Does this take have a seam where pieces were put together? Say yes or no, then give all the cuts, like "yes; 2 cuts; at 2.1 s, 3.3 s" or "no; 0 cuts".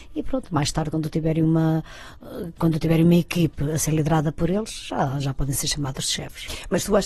no; 0 cuts